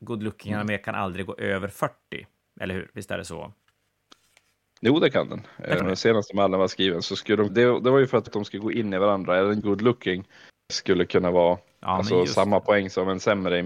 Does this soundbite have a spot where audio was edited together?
yes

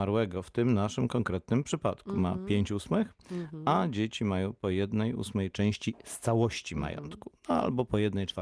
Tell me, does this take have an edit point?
no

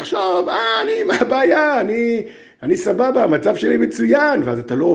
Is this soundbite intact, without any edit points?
yes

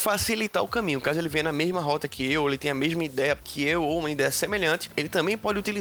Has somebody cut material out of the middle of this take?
no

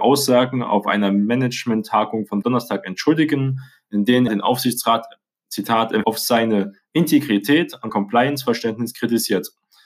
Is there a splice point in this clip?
yes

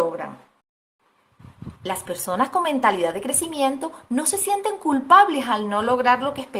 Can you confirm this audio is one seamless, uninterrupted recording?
no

